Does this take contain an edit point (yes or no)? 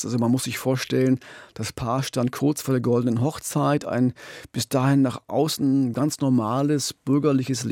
no